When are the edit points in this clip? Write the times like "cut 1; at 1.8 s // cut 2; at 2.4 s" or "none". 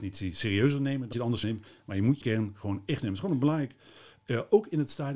cut 1; at 1.1 s // cut 2; at 1.4 s // cut 3; at 2.2 s // cut 4; at 3.0 s